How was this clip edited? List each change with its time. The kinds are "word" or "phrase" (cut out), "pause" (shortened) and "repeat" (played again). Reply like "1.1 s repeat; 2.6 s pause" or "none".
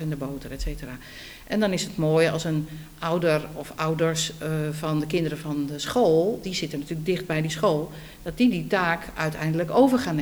none